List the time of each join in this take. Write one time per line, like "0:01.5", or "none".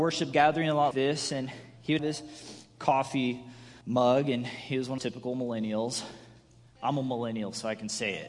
0:00.9
0:02.0
0:03.8
0:05.0